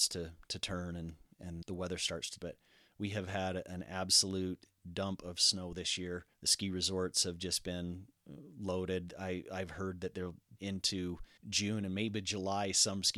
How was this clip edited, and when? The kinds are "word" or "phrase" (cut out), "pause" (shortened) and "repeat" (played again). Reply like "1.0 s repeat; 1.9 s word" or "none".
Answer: 1.6 s word; 2.4 s word; 6.3 s pause; 10.6 s phrase; 11.4 s pause